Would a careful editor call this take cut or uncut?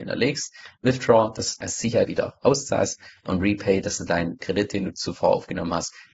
cut